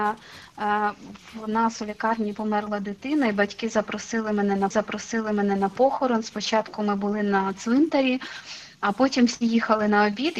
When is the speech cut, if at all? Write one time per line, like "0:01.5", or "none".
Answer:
0:04.7